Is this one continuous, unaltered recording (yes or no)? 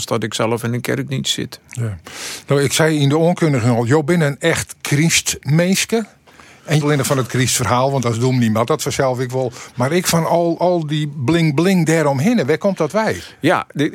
no